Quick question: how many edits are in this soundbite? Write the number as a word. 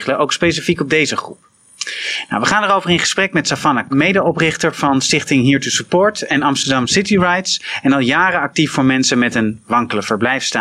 one